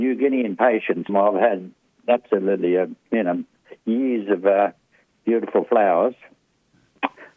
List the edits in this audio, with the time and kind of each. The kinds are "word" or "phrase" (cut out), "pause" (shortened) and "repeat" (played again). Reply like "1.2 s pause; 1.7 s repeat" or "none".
1.1 s word